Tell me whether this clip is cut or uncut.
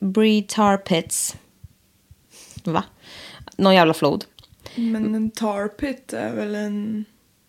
uncut